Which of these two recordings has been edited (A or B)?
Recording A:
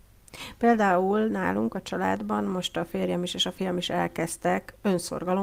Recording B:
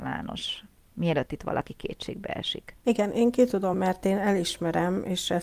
B